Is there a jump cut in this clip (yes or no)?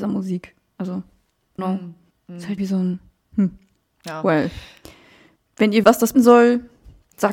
yes